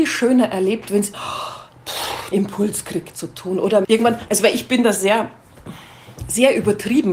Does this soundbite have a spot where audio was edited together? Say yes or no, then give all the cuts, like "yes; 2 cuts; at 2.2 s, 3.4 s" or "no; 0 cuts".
yes; 4 cuts; at 1.1 s, 2.3 s, 3.1 s, 3.8 s